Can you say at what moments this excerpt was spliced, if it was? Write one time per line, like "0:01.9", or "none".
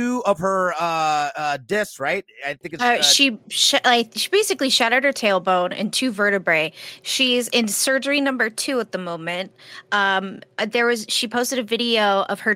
0:03.4